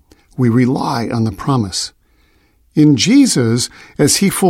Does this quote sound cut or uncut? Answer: uncut